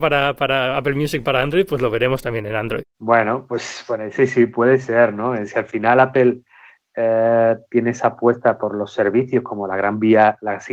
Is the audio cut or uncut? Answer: uncut